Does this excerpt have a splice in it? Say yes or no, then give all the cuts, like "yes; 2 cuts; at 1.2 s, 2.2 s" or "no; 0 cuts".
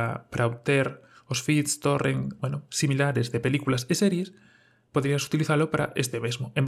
no; 0 cuts